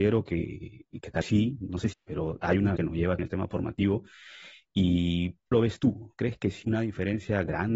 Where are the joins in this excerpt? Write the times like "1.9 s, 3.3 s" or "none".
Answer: 1.2 s, 1.9 s, 2.8 s, 3.2 s, 5.5 s, 6.6 s